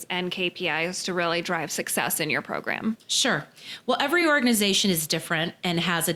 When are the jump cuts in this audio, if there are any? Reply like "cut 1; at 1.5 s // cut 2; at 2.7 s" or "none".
none